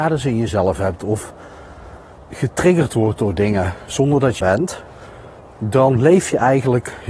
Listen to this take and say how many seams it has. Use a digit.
2